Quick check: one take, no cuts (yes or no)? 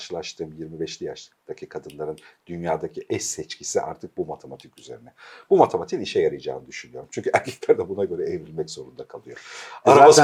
yes